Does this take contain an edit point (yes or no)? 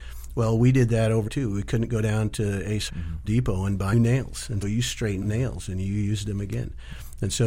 yes